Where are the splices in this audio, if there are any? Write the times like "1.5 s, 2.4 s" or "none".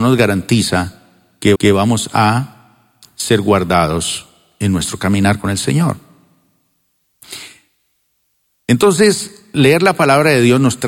1.6 s